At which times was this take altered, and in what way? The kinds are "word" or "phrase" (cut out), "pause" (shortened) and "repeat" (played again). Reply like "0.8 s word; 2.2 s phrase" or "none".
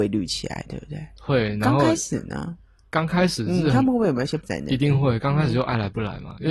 4.4 s word